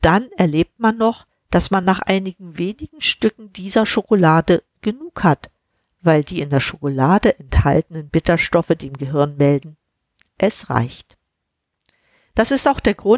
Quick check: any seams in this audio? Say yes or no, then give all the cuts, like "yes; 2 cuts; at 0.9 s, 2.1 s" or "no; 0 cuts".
no; 0 cuts